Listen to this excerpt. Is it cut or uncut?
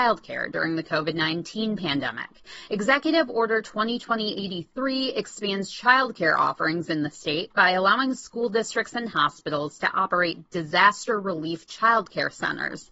uncut